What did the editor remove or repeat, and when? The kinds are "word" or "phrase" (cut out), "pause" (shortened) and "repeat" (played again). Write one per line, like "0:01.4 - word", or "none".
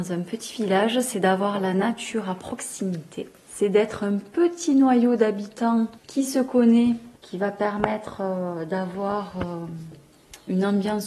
0:03.4 - pause
0:06.0 - pause
0:07.2 - pause